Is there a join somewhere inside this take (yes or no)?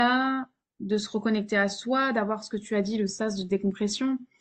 no